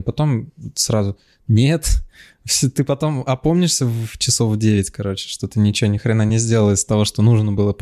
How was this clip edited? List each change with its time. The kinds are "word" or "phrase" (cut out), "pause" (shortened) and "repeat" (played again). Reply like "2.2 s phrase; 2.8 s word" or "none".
none